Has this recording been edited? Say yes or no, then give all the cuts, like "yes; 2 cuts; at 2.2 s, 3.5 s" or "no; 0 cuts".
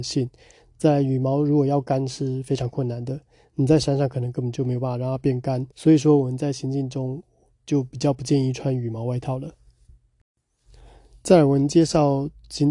yes; 1 cut; at 5.7 s